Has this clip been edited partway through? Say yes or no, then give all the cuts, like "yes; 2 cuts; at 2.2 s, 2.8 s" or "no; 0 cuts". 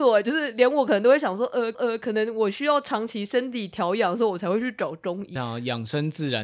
yes; 2 cuts; at 1.7 s, 5.4 s